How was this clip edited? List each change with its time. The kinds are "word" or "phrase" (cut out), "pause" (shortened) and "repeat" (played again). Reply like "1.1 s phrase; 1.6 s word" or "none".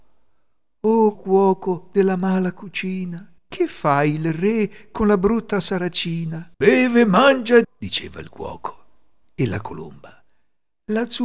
1.1 s word; 3.4 s pause; 6.5 s pause; 7.6 s word